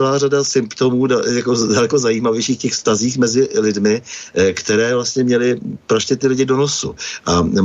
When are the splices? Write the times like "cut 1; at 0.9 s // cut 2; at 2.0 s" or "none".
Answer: none